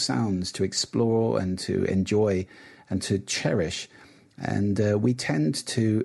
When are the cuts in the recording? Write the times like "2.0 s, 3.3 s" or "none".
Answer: none